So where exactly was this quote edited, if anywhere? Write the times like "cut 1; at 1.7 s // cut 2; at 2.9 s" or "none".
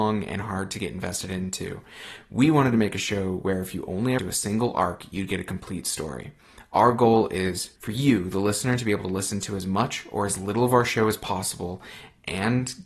cut 1; at 4.2 s // cut 2; at 7.8 s